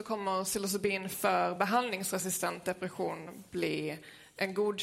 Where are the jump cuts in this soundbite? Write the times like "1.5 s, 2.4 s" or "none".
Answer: none

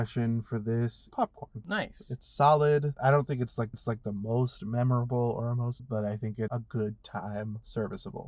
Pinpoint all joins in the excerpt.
1.1 s, 3.7 s, 5.8 s, 6.5 s

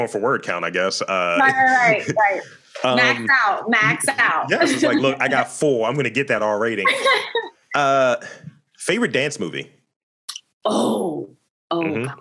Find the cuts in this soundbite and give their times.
none

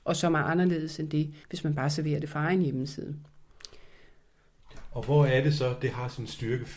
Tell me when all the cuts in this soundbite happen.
1.4 s

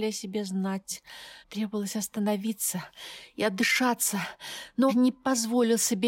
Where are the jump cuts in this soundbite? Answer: 1.4 s, 4.9 s

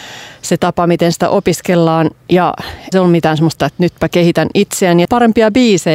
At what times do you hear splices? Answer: 2.9 s, 3.6 s, 5.0 s

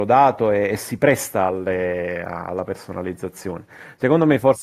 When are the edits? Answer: none

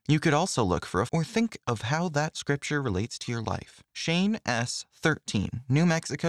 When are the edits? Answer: 1.1 s, 3.9 s

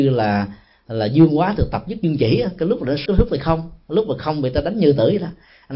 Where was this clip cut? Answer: 3.1 s

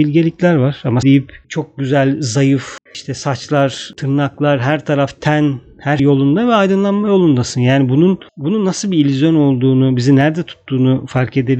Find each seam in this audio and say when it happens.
1.0 s, 1.4 s, 2.9 s, 6.0 s, 8.3 s

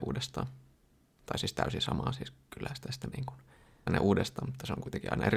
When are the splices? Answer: 3.1 s, 3.9 s

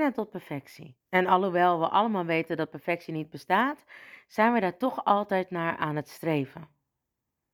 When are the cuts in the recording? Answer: 1.0 s

